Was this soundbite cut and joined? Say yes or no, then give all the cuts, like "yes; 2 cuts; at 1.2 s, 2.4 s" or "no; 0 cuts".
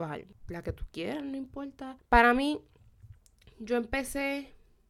no; 0 cuts